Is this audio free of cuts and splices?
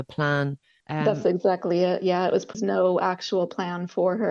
yes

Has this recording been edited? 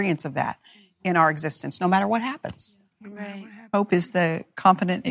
no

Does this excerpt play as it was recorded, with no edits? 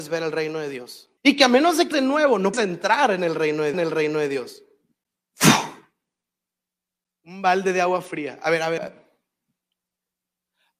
no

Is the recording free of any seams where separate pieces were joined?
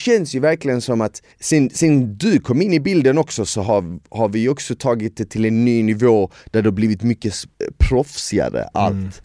no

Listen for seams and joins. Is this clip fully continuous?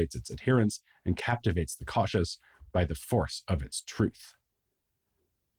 yes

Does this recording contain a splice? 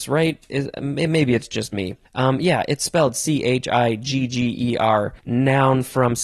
yes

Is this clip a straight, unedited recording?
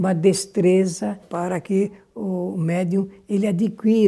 no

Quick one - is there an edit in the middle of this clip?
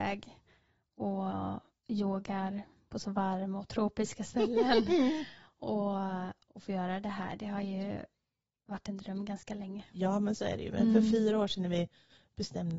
no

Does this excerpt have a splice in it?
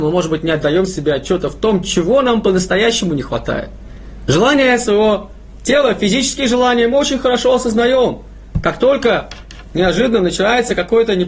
no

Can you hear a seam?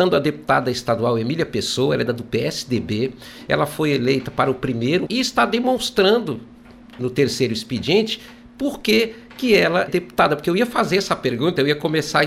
yes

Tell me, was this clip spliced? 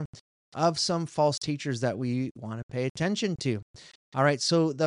no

